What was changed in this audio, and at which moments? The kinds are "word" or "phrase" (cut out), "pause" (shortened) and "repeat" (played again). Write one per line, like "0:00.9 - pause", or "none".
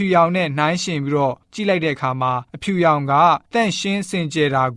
0:01.4 - pause
0:02.5 - pause
0:03.5 - pause